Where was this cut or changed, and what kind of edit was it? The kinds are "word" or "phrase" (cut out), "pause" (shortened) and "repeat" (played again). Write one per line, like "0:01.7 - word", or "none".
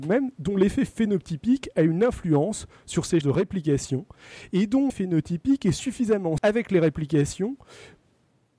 0:03.2 - word
0:04.9 - word
0:06.4 - word